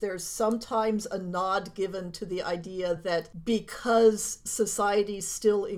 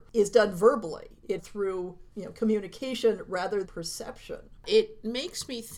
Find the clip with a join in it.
second; 2 cuts; at 1.4 s, 3.6 s

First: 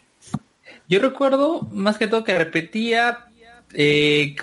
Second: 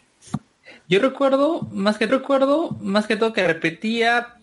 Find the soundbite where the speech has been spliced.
second; 1 cut; at 2.1 s

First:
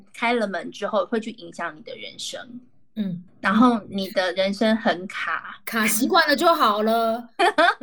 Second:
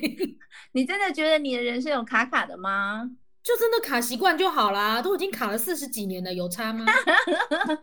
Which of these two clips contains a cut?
first; 1 cut; at 3.3 s

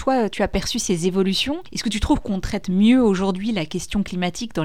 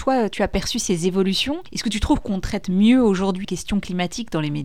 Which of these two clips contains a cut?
second; 1 cut; at 3.4 s

